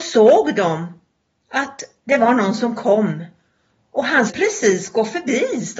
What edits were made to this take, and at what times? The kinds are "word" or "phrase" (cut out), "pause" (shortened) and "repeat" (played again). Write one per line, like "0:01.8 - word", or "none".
0:04.3 - word